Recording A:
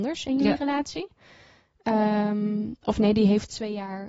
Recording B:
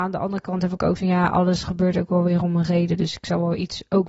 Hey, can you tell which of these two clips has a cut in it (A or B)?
B